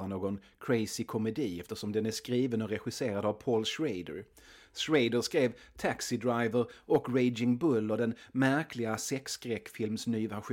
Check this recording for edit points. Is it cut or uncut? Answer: uncut